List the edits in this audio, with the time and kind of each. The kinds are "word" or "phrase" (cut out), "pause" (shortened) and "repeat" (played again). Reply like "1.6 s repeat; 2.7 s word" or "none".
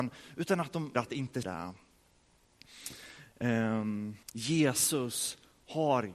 0.9 s word; 1.4 s word; 4.2 s pause